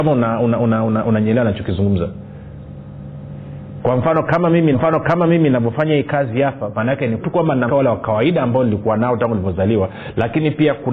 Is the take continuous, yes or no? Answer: no